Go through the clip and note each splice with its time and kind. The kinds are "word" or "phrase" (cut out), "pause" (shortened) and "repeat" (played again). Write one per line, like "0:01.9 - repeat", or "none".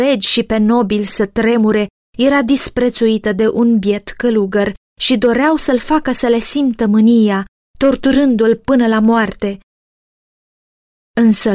none

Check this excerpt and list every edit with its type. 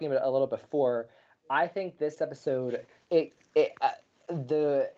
none

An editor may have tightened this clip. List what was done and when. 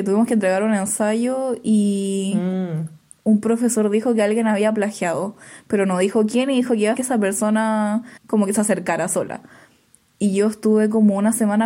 0:07.0 - word
0:08.2 - pause

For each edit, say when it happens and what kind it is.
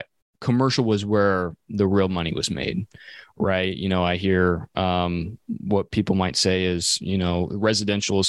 none

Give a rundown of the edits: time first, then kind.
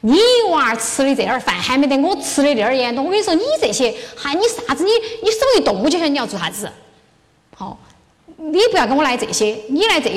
none

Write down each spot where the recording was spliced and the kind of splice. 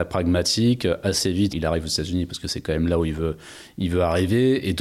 0:01.5 - word

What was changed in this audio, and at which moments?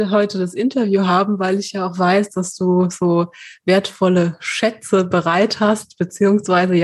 none

